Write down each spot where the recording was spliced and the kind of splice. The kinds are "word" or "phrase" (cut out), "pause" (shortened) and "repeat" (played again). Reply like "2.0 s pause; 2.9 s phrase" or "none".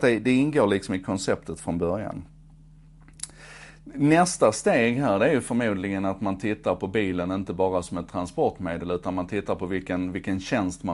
none

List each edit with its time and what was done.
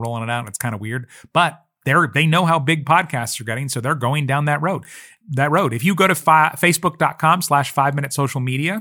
none

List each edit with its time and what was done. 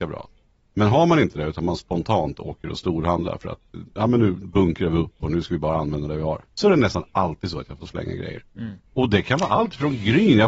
6.5 s pause; 8.9 s pause

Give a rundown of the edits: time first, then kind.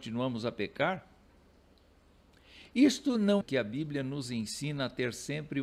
3.4 s word

